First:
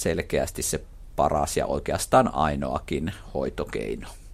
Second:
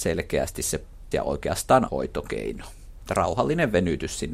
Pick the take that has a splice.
second; 2 cuts; at 1.1 s, 1.9 s

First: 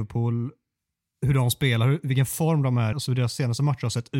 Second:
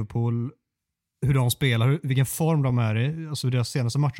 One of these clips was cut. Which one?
first; 1 cut; at 2.9 s

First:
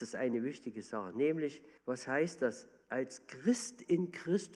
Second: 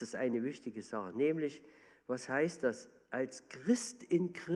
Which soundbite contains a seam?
first; 1 cut; at 1.8 s

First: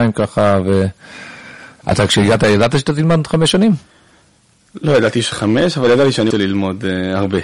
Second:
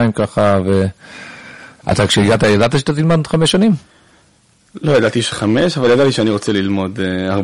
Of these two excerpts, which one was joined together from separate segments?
first; 1 cut; at 6.3 s

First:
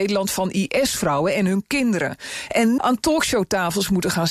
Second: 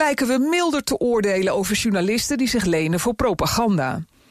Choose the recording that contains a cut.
first; 1 cut; at 2.8 s

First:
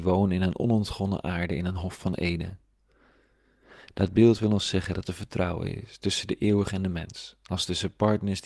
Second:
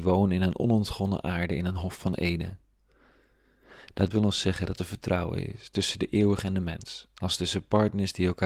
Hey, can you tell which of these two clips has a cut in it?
second; 1 cut; at 4.1 s

